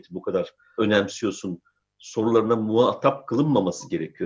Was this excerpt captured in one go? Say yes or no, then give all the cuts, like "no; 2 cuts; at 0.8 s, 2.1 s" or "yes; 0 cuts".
yes; 0 cuts